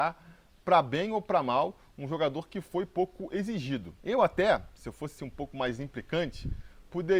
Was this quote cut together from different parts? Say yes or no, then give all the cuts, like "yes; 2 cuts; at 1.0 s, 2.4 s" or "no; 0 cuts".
yes; 1 cut; at 5.2 s